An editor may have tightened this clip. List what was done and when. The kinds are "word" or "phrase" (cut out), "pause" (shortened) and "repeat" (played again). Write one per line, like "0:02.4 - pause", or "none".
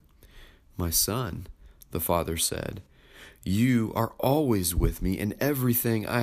none